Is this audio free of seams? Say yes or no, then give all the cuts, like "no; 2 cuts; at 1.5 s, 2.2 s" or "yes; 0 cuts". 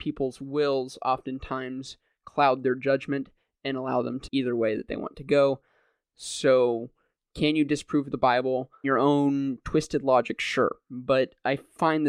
no; 2 cuts; at 4.3 s, 8.8 s